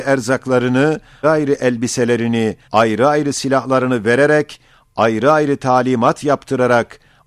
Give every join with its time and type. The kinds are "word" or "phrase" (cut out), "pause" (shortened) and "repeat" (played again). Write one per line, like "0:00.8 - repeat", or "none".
0:01.2 - word
0:02.6 - pause